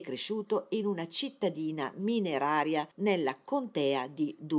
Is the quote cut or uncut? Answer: cut